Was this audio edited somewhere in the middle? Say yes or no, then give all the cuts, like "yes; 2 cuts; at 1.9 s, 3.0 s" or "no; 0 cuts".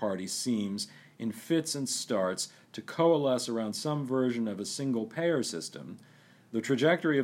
no; 0 cuts